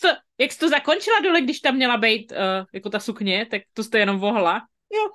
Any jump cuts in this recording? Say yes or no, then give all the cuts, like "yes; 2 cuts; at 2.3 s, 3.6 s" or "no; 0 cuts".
no; 0 cuts